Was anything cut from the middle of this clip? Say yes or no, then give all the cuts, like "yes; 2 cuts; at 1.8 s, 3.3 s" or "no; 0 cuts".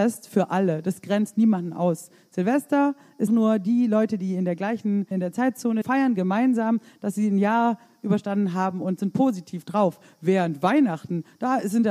yes; 3 cuts; at 3.3 s, 5.1 s, 5.8 s